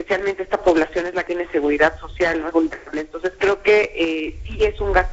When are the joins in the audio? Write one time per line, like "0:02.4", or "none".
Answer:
0:01.3
0:02.5